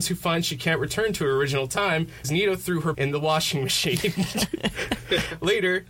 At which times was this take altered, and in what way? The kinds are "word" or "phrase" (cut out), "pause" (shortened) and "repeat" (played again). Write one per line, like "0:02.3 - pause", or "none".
0:02.2 - word
0:02.9 - word